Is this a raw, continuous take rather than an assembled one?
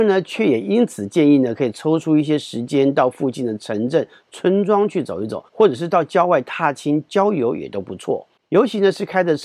no; 2 cuts; at 5.5 s, 8.4 s

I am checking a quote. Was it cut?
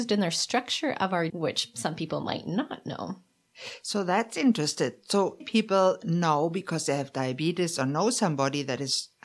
yes; 2 cuts; at 1.3 s, 5.4 s

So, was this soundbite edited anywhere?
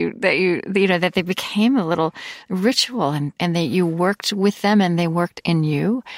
no; 0 cuts

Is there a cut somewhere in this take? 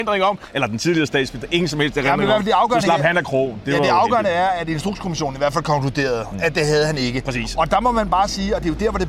no; 0 cuts

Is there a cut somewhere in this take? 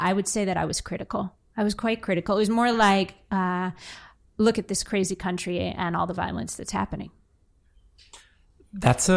no; 0 cuts

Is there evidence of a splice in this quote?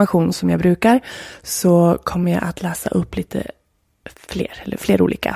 no; 0 cuts

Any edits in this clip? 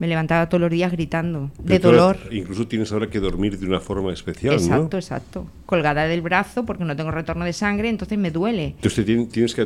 no; 0 cuts

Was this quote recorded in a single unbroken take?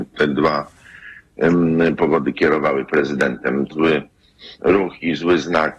no; 1 cut; at 3.7 s

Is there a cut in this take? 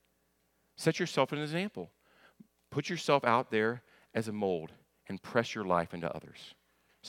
no; 0 cuts

